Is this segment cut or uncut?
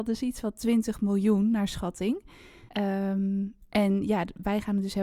cut